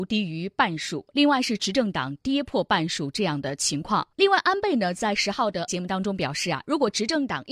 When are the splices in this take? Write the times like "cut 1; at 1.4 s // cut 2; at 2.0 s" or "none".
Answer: cut 1; at 4.1 s // cut 2; at 5.7 s